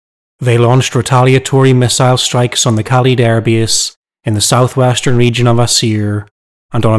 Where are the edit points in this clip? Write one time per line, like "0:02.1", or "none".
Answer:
0:02.9

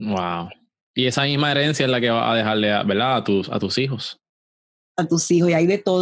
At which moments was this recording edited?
none

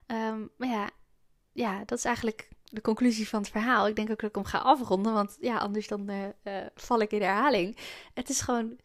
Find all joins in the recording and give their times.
none

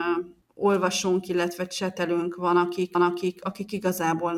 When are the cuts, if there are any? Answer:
0:02.9

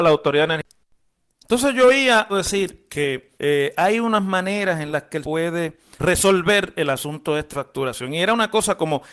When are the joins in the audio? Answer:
0:02.3
0:03.3
0:05.2
0:06.0
0:07.5

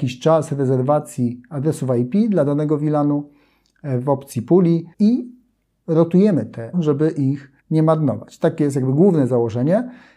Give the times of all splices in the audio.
0:04.9
0:06.7
0:07.6

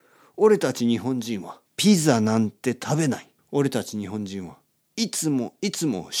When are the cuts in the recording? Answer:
0:01.7
0:03.4

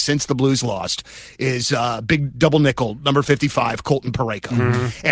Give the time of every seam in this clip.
none

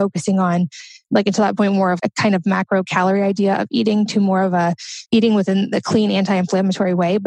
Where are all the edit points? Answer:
0:02.0
0:05.1

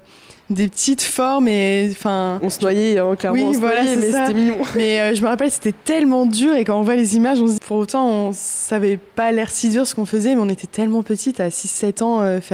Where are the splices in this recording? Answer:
0:07.6

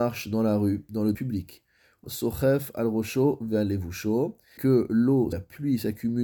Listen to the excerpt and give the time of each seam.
0:01.1
0:02.0
0:04.6
0:05.3

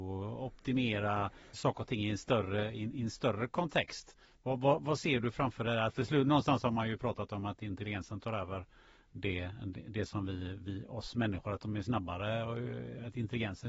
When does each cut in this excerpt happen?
0:01.5

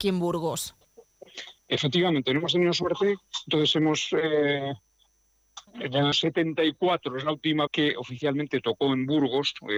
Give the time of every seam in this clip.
0:01.6
0:05.7
0:06.1
0:07.7

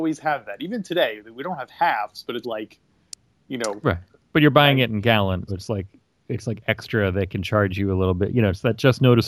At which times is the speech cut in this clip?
0:02.4
0:05.5

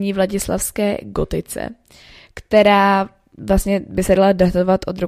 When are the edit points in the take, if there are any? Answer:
none

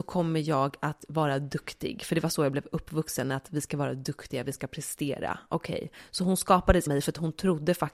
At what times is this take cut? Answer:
0:06.9

